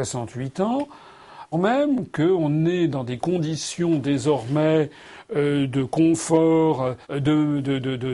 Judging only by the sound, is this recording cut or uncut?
cut